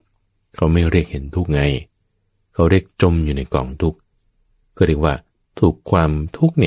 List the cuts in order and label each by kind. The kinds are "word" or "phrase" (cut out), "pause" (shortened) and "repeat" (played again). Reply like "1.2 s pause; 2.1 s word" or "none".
none

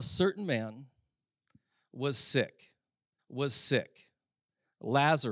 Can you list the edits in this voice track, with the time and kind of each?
3.2 s repeat

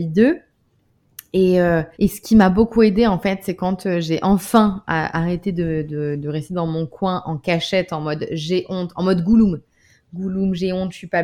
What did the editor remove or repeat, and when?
1.9 s pause

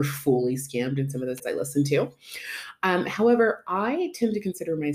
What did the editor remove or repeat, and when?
1.4 s word

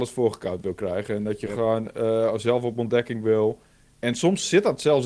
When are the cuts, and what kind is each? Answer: none

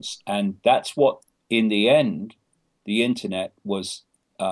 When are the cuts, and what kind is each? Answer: none

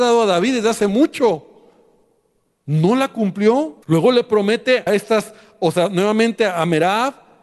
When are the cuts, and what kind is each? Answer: 3.8 s pause; 4.9 s word

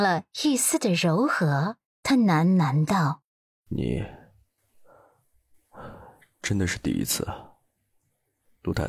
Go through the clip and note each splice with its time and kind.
1.8 s pause; 3.3 s pause

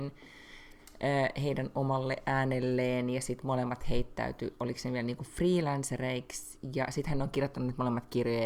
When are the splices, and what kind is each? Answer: none

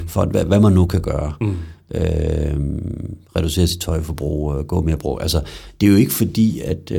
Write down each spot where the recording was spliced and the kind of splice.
3.2 s pause

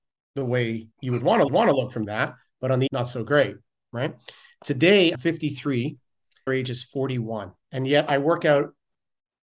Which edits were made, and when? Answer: 0.9 s pause; 1.5 s repeat; 2.1 s word; 2.9 s word; 5.1 s word; 6.5 s phrase; 7.6 s pause

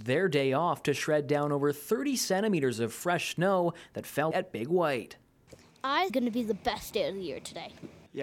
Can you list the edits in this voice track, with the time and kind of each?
4.3 s word; 6.1 s phrase

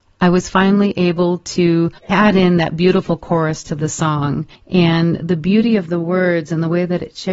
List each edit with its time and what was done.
2.0 s pause; 4.5 s pause

